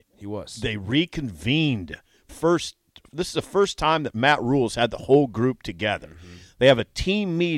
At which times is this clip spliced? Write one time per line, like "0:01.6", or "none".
0:02.3